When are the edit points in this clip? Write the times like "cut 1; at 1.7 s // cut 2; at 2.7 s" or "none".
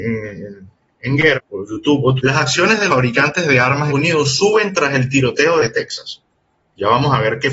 cut 1; at 1.3 s // cut 2; at 2.2 s // cut 3; at 2.9 s // cut 4; at 3.9 s